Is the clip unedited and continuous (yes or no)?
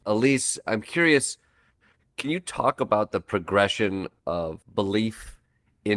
no